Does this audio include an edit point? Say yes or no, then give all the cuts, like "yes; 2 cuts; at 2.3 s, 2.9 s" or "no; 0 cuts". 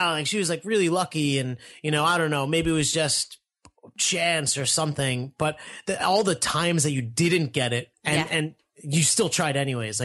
yes; 1 cut; at 7.9 s